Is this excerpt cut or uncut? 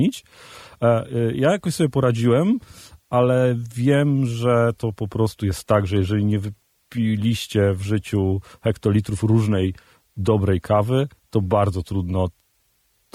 uncut